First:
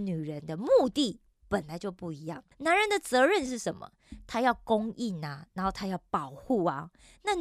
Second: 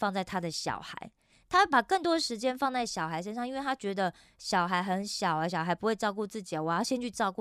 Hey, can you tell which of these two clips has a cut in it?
first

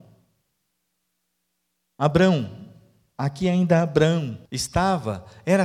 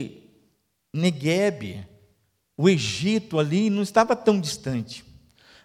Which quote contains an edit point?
first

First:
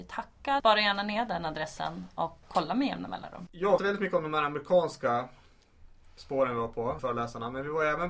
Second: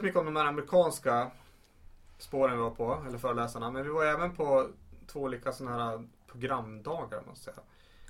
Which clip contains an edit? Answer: first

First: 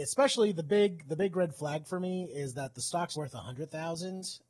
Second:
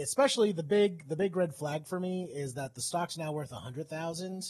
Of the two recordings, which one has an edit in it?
first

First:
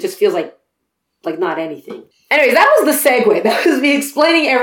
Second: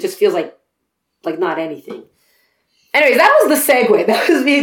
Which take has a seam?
first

